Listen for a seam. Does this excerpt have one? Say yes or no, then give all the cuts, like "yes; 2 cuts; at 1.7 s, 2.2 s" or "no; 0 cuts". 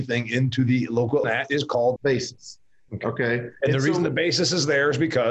yes; 2 cuts; at 1.2 s, 2.0 s